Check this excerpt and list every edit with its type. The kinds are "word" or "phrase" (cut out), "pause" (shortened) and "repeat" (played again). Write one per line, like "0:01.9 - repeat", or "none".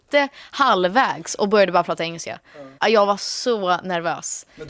0:02.8 - pause